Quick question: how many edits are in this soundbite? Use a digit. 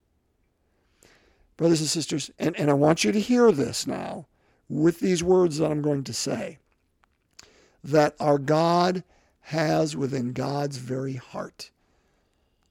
1